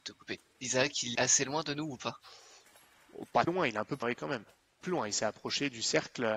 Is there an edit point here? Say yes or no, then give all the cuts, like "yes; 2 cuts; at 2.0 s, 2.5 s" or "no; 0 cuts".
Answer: yes; 4 cuts; at 1.1 s, 3.5 s, 4.0 s, 4.8 s